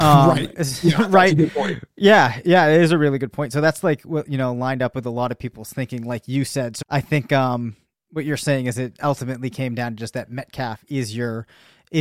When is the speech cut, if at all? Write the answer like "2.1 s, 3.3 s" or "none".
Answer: 6.8 s